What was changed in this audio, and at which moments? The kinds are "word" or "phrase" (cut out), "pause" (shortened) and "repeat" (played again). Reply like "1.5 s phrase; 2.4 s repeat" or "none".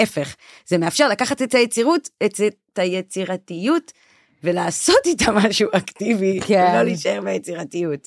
none